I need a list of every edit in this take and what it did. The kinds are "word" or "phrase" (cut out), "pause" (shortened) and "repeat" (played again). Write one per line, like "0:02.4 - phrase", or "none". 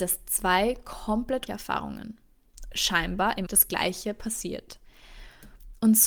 0:01.5 - word
0:02.7 - word
0:03.5 - word